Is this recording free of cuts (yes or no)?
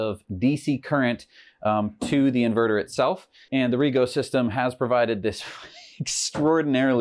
yes